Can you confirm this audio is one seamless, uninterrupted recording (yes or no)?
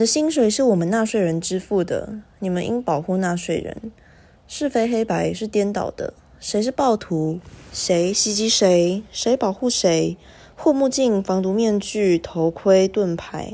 yes